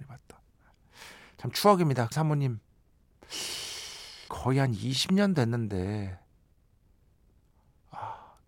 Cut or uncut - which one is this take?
cut